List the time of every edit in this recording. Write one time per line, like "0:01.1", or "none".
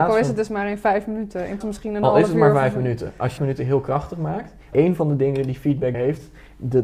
0:01.6
0:03.4
0:04.7
0:05.9